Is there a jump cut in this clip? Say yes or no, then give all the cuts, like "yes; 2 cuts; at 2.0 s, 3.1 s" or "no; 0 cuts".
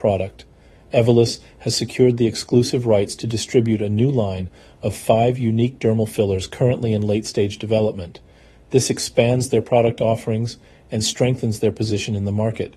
no; 0 cuts